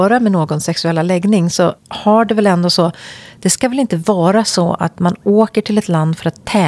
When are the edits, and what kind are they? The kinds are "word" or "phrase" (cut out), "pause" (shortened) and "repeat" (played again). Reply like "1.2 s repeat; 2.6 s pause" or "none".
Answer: 1.8 s pause